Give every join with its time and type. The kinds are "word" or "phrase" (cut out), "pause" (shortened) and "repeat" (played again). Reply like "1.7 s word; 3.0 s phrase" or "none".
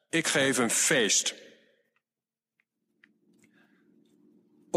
none